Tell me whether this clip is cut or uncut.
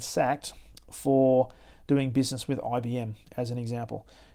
uncut